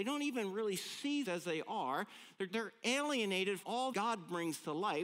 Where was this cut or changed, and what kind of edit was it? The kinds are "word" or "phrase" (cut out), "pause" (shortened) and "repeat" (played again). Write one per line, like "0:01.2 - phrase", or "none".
0:01.2 - word
0:02.5 - word
0:03.6 - word
0:03.9 - word